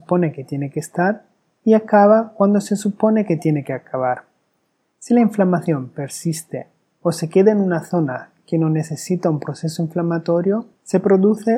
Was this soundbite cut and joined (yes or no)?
no